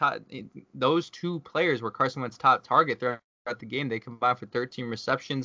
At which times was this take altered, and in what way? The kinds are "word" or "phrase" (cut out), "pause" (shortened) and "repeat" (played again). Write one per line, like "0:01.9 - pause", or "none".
none